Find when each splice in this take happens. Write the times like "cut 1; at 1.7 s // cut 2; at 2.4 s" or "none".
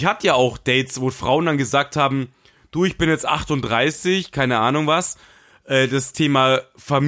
none

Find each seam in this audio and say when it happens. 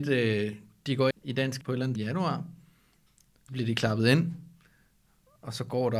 cut 1; at 1.1 s // cut 2; at 1.6 s // cut 3; at 2.0 s // cut 4; at 3.5 s

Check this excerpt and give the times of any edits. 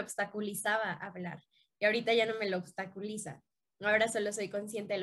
none

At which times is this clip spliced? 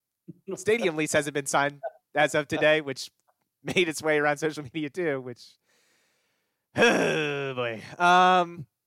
none

